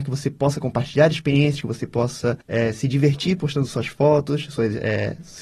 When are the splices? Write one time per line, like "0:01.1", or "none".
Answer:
0:02.4